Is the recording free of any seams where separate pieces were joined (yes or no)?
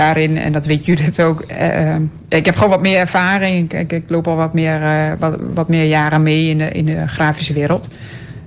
yes